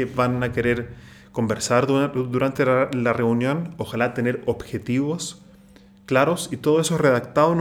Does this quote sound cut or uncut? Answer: uncut